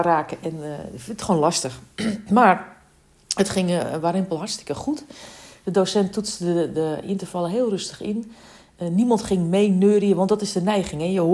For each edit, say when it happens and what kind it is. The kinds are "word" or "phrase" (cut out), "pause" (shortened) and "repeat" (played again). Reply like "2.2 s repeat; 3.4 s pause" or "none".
none